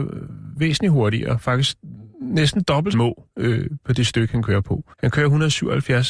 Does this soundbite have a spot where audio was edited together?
yes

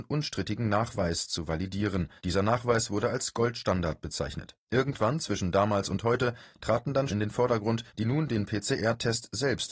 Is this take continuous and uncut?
no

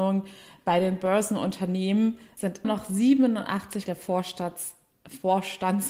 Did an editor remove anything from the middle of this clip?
yes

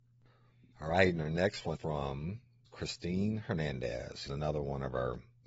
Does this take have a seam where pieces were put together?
yes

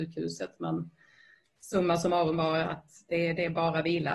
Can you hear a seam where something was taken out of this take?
no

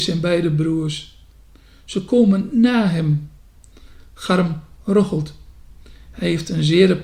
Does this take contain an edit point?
no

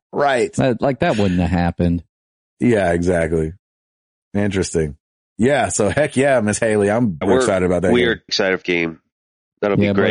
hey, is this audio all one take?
no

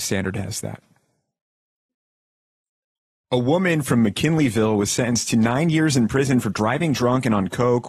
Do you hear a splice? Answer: no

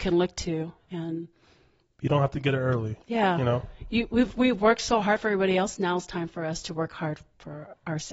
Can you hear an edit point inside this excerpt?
no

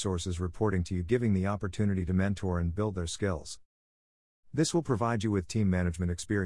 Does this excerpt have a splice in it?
no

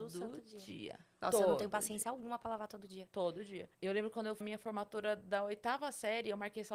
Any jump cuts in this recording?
yes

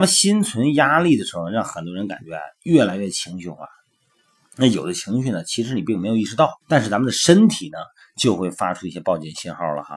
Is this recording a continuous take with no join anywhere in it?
no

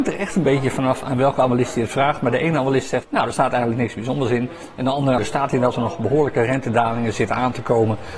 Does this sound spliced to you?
yes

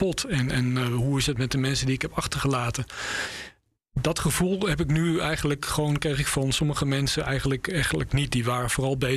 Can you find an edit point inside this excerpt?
no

